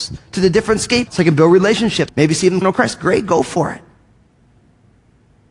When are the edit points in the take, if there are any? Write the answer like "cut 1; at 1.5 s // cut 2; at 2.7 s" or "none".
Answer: cut 1; at 1.1 s // cut 2; at 2.1 s // cut 3; at 2.6 s